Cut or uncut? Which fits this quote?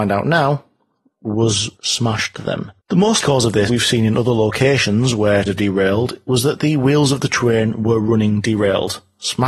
cut